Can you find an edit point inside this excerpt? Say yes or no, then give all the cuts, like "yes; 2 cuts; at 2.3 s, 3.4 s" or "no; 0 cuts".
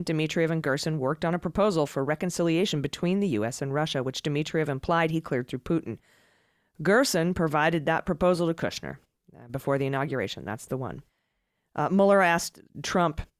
no; 0 cuts